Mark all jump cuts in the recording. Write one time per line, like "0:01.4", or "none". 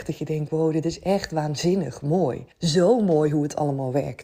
0:02.5

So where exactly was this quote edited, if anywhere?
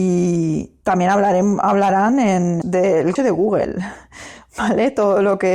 0:02.6
0:03.2

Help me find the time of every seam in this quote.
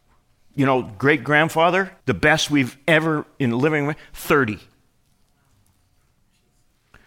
0:02.0

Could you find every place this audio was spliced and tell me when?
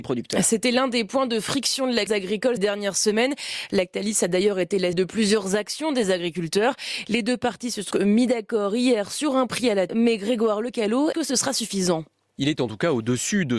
0:02.1
0:02.6
0:04.9
0:07.9
0:09.9
0:11.1

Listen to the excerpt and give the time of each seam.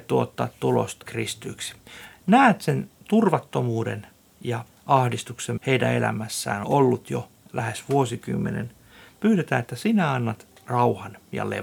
0:01.0
0:04.7
0:05.6
0:06.6

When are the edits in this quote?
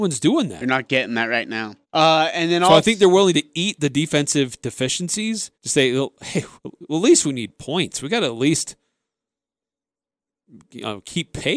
0:01.8
0:05.5
0:06.6

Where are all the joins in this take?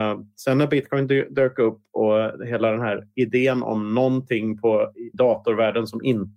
0:05.1

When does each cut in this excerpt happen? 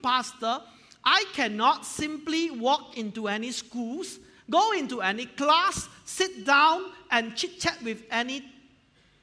none

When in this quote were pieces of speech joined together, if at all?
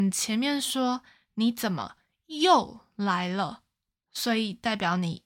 none

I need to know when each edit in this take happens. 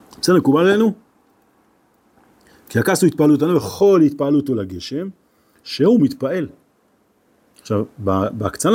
none

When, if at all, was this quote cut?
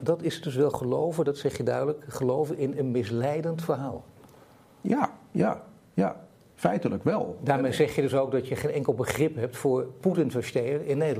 none

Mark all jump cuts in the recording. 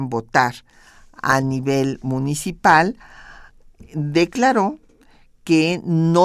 none

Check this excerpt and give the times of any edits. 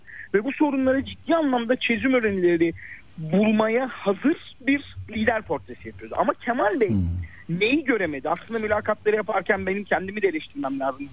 none

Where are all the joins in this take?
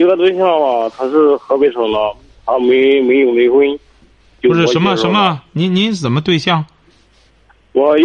none

